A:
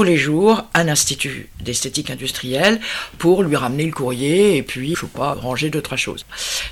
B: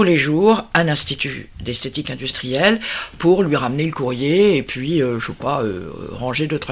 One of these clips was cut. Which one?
A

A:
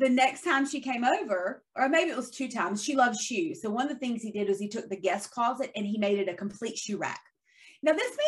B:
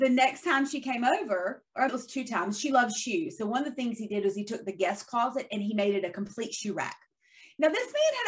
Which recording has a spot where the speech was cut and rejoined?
B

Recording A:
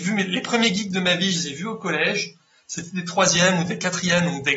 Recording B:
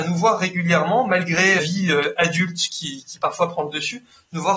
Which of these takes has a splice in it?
B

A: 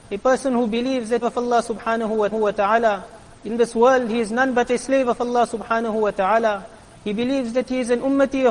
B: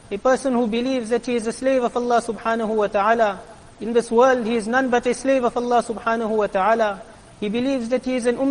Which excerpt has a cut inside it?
A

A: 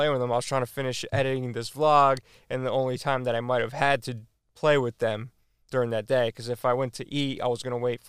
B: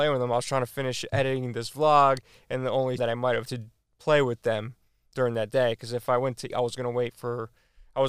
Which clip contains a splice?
B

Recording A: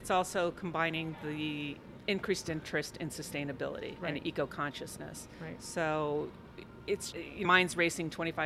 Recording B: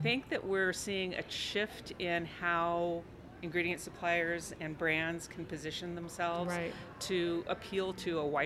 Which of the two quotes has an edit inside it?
A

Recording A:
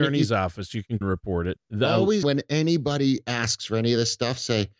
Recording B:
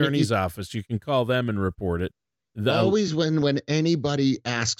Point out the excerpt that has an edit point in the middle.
A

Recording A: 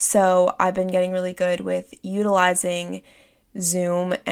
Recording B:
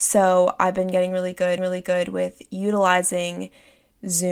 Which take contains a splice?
B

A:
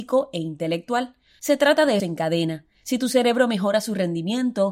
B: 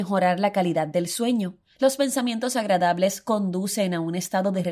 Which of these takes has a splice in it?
A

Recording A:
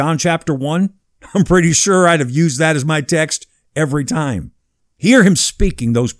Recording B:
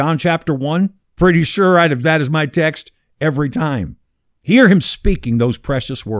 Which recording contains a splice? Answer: B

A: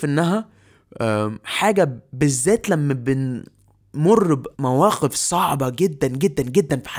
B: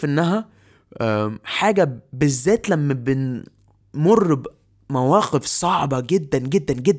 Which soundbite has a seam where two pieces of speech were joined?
A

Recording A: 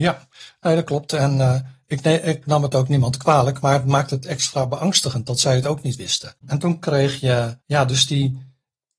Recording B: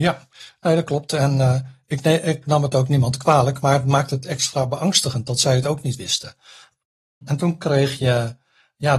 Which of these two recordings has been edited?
A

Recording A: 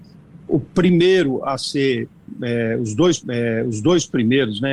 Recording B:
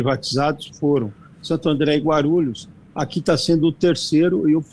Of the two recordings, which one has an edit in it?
A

